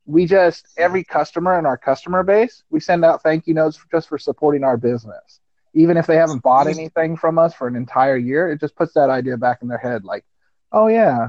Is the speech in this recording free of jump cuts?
yes; 0 cuts

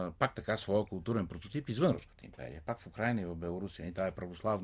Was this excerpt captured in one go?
yes; 0 cuts

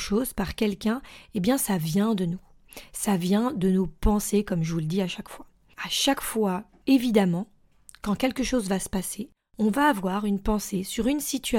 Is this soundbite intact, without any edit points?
yes; 0 cuts

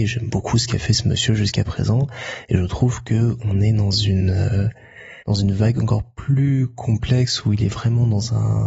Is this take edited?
yes; 1 cut; at 5.2 s

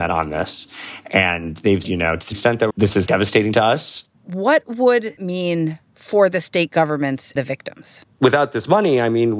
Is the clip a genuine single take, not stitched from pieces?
no; 8 cuts; at 1.8 s, 2.3 s, 2.7 s, 3.1 s, 4.1 s, 5.2 s, 7.4 s, 8.1 s

